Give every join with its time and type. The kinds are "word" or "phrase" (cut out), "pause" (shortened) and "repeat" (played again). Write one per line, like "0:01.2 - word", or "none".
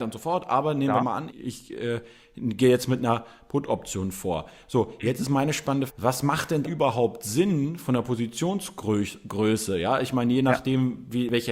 0:01.3 - word
0:05.9 - word
0:06.6 - word

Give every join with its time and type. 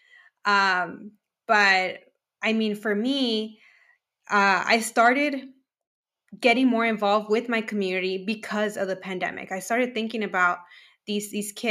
none

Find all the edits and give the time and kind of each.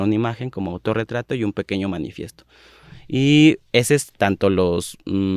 none

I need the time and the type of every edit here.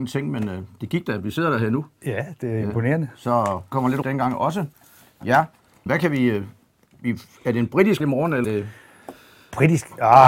0:03.7 - word
0:04.0 - word
0:05.9 - word
0:08.0 - word
0:08.4 - word

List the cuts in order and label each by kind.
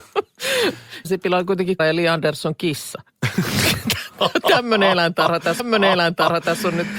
0:01.0 - word
0:01.8 - word
0:05.6 - repeat

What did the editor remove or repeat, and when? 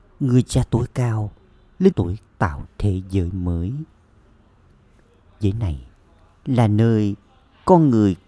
0:01.9 - word
0:02.3 - word
0:02.6 - word
0:05.4 - word

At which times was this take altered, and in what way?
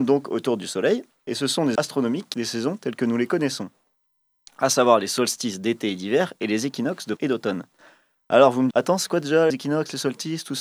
0:01.8 - word
0:02.3 - word
0:07.2 - word
0:08.7 - word
0:09.5 - word

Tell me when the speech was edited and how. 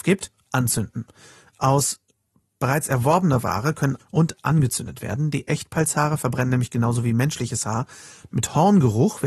0:04.0 - phrase

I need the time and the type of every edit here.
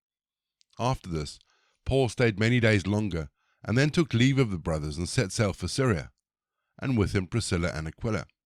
none

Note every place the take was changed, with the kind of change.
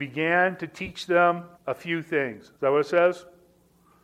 0:01.6 - pause
0:02.6 - pause

